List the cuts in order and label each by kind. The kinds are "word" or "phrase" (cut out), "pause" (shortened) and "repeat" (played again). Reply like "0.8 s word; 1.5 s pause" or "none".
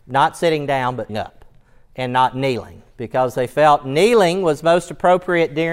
1.1 s word